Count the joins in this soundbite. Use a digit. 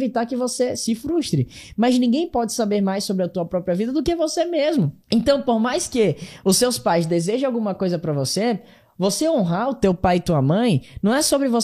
1